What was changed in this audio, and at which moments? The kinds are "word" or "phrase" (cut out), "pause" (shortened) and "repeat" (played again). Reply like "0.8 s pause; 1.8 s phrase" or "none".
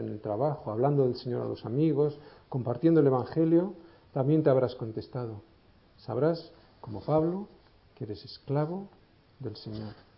none